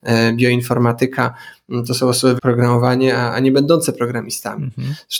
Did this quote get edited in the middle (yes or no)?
yes